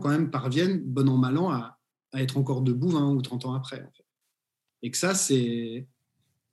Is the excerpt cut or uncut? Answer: uncut